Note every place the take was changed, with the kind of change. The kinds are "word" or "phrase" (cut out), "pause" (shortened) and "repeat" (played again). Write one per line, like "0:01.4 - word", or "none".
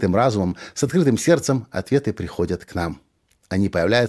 none